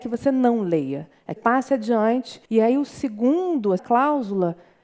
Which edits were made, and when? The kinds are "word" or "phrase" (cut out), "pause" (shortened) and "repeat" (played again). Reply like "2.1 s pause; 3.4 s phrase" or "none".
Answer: 1.4 s word; 2.5 s pause; 3.8 s word